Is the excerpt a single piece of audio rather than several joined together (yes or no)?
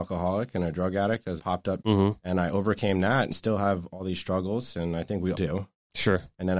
no